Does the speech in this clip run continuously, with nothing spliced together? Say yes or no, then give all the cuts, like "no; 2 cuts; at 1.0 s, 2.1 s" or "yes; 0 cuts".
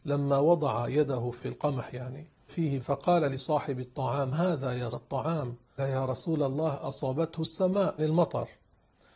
no; 7 cuts; at 1.4 s, 2.5 s, 2.8 s, 4.3 s, 4.9 s, 5.8 s, 8.0 s